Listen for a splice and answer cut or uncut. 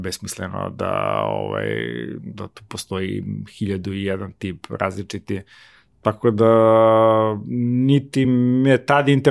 uncut